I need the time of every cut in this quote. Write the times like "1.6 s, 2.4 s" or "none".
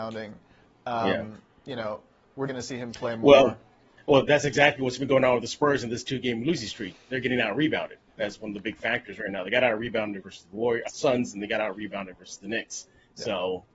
2.5 s, 4.3 s, 10.9 s